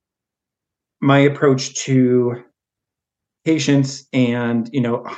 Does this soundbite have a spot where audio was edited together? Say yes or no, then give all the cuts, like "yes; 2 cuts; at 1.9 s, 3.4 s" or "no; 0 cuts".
no; 0 cuts